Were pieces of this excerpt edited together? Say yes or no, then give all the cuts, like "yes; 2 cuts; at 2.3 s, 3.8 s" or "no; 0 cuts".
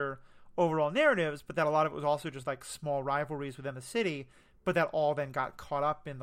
no; 0 cuts